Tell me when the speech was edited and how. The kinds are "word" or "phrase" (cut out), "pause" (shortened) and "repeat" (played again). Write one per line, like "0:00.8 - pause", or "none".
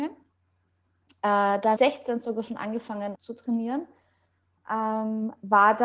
0:01.7 - word
0:03.1 - word

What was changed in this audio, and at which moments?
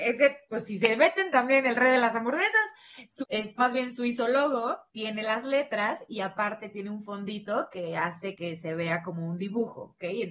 0:03.2 - word
0:03.6 - word
0:04.9 - pause

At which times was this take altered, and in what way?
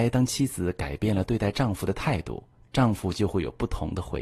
none

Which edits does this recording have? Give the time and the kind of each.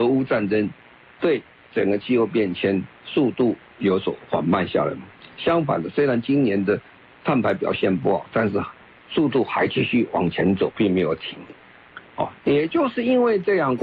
0:12.4 - pause

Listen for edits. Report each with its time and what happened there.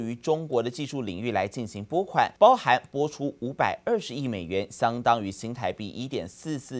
0:02.4 - pause

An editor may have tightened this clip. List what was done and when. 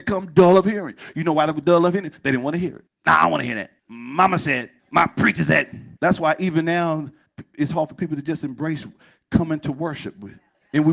0:02.9 - pause
0:03.8 - pause
0:04.8 - pause
0:06.0 - pause

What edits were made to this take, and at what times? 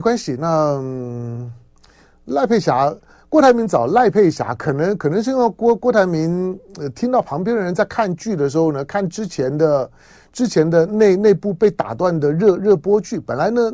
none

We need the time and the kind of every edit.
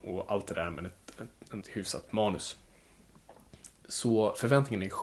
0:01.6 - word
0:02.1 - word

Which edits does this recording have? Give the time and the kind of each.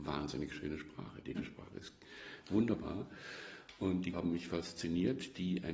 0:01.4 - word
0:04.1 - word

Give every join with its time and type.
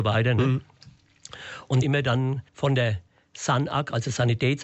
0:01.8 - phrase
0:02.5 - pause

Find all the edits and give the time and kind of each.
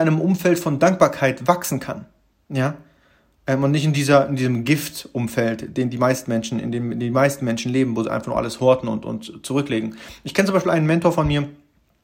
none

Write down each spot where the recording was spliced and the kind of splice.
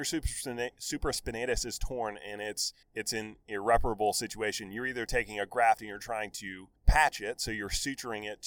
0:02.8 - pause
0:06.8 - pause

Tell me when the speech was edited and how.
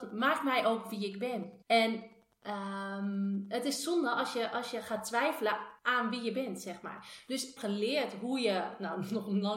0:01.6 - pause
0:05.8 - pause
0:07.6 - phrase

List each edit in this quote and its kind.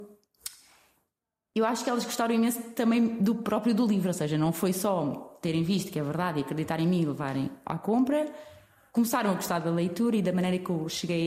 none

